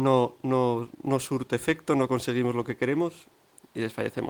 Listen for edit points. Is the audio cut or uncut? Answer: uncut